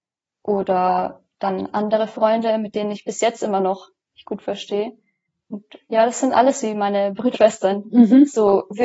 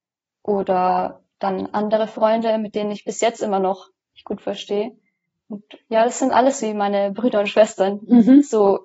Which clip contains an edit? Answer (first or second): first